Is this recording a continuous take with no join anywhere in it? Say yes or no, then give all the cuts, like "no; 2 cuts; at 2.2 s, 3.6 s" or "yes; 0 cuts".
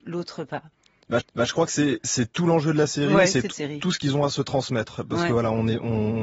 no; 2 cuts; at 1.2 s, 3.5 s